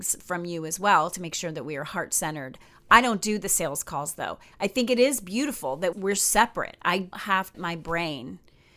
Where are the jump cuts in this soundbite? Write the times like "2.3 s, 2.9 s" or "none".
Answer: 5.9 s, 7.1 s, 7.5 s